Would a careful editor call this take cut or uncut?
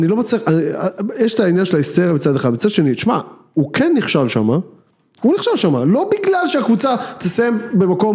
uncut